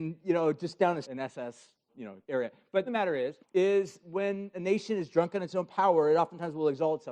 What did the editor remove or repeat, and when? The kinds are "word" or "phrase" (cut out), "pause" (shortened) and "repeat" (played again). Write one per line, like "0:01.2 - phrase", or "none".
0:01.0 - phrase
0:01.9 - word
0:02.2 - pause
0:02.9 - phrase
0:03.4 - pause
0:04.5 - word